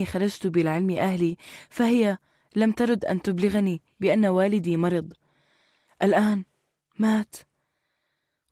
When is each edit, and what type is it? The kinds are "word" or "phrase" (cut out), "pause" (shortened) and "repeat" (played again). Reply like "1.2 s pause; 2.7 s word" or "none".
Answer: none